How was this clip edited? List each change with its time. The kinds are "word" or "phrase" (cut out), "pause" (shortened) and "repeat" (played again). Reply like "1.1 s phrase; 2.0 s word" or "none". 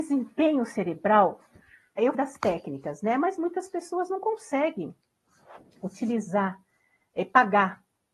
2.1 s word